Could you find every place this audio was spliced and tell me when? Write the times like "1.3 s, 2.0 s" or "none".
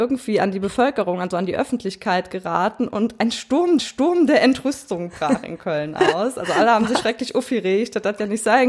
3.8 s